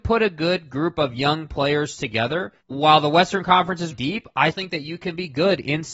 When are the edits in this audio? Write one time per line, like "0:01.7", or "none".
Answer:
0:02.6
0:03.9
0:04.5